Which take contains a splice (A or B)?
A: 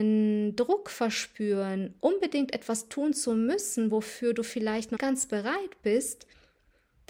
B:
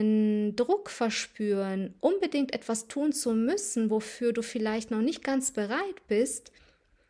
A